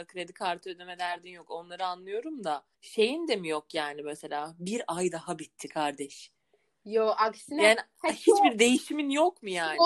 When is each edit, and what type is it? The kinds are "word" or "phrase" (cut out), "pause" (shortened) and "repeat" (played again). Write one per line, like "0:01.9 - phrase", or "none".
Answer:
0:02.7 - pause